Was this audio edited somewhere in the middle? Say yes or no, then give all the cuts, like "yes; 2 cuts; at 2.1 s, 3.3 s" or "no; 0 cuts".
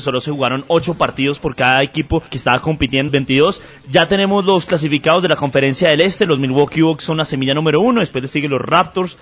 yes; 2 cuts; at 2.3 s, 3.1 s